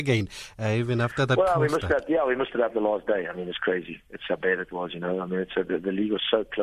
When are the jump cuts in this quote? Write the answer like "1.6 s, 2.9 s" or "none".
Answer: none